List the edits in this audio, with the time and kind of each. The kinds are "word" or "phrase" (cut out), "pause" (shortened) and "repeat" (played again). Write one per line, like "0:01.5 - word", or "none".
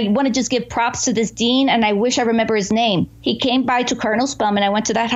none